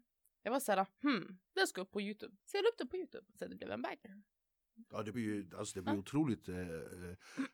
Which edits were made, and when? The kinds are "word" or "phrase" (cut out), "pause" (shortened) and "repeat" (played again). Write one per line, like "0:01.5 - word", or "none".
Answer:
0:01.5 - pause
0:02.4 - pause
0:03.3 - pause
0:05.1 - word
0:05.8 - word